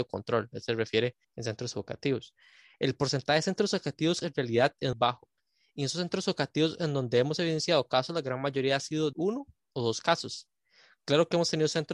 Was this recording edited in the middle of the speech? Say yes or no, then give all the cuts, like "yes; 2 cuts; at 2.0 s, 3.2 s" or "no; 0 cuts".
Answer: yes; 4 cuts; at 1.2 s, 4.2 s, 4.9 s, 9.1 s